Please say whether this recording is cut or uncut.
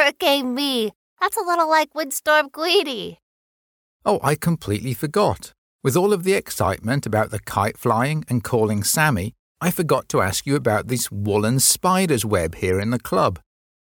uncut